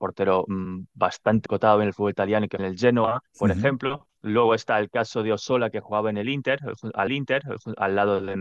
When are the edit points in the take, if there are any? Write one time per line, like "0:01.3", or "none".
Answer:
0:01.5
0:02.6
0:03.3
0:04.2
0:07.1